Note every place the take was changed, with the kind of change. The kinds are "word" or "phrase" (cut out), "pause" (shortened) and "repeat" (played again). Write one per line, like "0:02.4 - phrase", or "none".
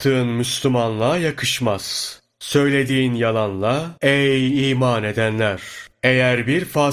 0:04.0 - pause